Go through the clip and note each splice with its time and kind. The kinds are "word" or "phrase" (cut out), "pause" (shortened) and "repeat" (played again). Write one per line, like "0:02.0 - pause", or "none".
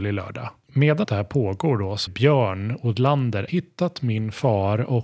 0:01.0 - word
0:02.1 - word
0:03.5 - word